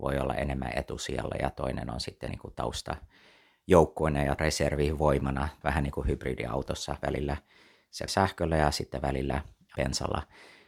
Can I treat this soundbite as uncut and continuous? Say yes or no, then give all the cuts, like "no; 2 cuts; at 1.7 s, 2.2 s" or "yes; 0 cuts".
no; 4 cuts; at 2.3 s, 4.4 s, 5.6 s, 8.1 s